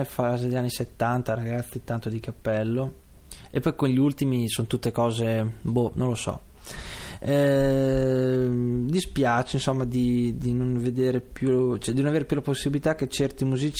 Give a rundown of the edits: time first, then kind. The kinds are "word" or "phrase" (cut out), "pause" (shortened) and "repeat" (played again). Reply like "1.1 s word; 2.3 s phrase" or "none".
none